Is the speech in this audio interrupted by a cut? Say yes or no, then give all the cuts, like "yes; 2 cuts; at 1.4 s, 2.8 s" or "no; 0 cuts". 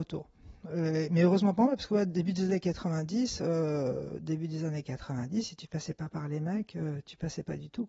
no; 0 cuts